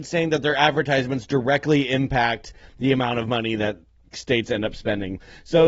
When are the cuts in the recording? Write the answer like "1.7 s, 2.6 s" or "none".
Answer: 4.1 s